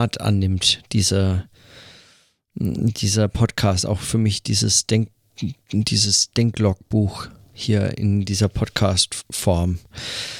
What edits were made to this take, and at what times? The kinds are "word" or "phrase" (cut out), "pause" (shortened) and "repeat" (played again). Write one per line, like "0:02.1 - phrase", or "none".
none